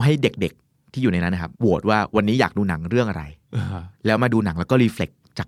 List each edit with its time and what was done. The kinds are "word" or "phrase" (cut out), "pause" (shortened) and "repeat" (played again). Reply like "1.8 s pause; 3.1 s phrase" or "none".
1.5 s pause; 4.0 s pause